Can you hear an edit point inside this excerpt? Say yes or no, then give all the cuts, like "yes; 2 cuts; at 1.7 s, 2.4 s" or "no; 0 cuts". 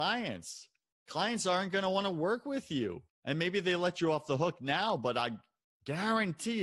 yes; 1 cut; at 3.1 s